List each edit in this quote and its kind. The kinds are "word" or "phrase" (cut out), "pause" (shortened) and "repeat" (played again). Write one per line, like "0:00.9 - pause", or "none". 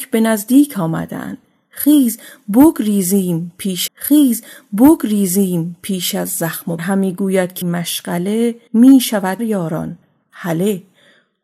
0:03.9 - repeat
0:06.8 - phrase
0:07.6 - word
0:08.7 - pause
0:09.4 - phrase